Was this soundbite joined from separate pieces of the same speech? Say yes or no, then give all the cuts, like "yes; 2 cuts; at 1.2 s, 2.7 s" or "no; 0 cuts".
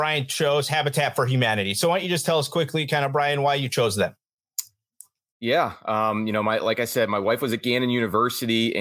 no; 0 cuts